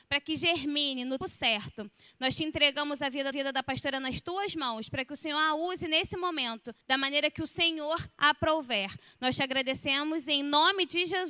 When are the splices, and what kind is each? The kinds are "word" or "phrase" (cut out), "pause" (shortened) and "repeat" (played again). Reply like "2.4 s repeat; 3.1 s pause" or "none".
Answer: 1.2 s word; 3.3 s repeat; 6.8 s pause